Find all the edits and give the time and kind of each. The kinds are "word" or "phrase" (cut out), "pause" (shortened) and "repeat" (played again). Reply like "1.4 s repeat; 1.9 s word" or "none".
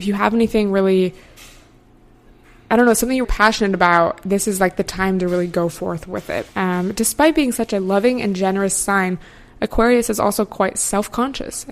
3.2 s word; 6.5 s pause